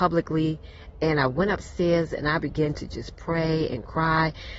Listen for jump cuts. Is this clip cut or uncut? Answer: uncut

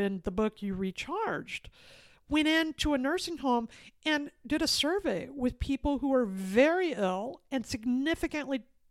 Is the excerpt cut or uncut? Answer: uncut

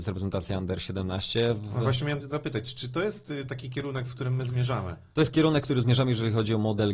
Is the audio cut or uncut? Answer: cut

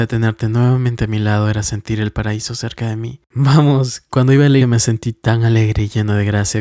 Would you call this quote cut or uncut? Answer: cut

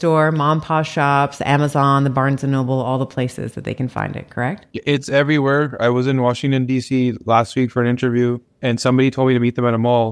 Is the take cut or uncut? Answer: cut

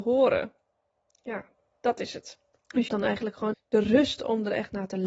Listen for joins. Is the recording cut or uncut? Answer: cut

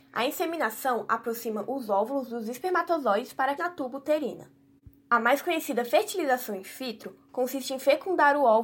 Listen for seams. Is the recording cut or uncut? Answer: cut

